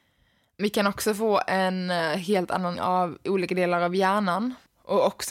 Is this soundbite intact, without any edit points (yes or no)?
no